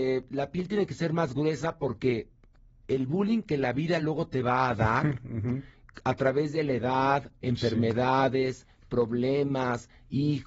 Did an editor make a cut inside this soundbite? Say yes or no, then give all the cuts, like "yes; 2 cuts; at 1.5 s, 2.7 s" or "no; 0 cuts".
no; 0 cuts